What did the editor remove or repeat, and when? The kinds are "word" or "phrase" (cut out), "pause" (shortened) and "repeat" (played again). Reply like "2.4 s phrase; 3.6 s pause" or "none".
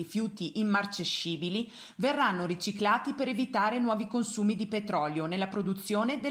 none